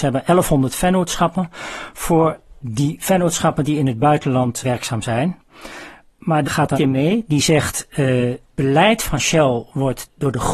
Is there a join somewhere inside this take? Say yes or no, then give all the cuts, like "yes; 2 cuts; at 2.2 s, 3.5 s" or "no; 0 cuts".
yes; 4 cuts; at 4.6 s, 6.4 s, 6.7 s, 8.5 s